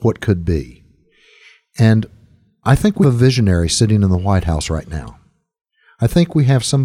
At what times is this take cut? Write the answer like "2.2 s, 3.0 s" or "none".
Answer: 3.0 s